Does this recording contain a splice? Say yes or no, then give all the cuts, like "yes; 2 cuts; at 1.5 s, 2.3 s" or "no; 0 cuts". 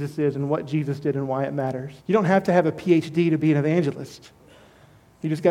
yes; 1 cut; at 2.0 s